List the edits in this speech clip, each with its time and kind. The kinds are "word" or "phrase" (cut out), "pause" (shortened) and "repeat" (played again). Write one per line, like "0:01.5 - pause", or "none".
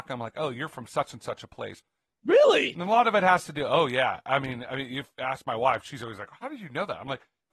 none